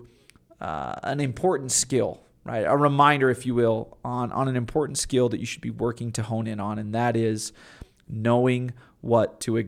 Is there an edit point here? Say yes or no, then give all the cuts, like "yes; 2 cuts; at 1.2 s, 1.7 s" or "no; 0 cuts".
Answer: no; 0 cuts